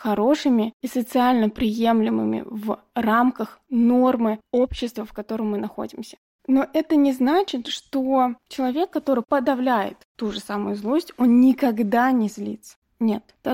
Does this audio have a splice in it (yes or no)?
no